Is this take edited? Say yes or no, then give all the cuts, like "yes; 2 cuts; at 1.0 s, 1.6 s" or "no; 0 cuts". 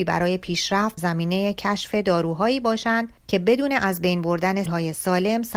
yes; 3 cuts; at 1.0 s, 3.2 s, 4.7 s